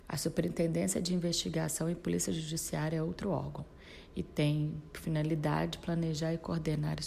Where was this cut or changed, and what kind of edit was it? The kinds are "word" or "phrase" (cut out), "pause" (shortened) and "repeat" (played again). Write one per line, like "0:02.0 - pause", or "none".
none